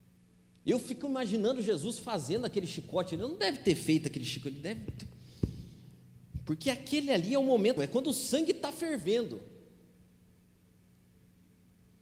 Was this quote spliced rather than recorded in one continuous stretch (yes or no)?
yes